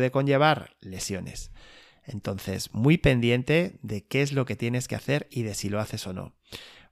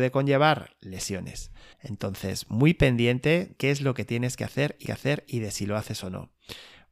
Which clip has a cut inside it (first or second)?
second